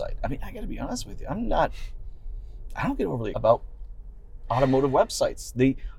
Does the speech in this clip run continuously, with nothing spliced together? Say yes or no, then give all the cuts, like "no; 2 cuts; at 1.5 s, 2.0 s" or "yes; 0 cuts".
no; 1 cut; at 3.3 s